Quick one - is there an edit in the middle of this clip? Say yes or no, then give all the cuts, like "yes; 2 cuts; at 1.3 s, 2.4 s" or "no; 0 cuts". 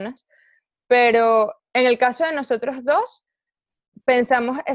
no; 0 cuts